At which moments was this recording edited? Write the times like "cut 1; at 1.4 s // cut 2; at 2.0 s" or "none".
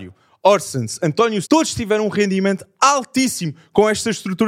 cut 1; at 1.4 s